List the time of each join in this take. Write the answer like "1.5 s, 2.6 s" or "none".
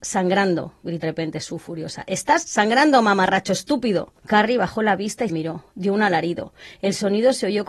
1.0 s, 4.2 s, 5.3 s